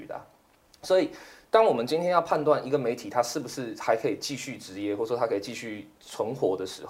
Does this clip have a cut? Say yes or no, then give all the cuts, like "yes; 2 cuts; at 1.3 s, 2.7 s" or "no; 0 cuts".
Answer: no; 0 cuts